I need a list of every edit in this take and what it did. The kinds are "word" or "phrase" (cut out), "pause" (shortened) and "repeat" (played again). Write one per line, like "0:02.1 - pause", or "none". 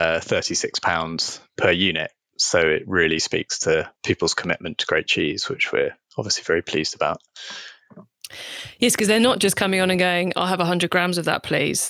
0:04.0 - pause